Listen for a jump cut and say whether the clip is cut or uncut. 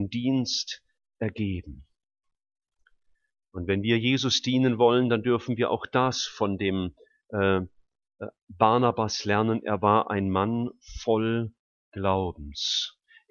uncut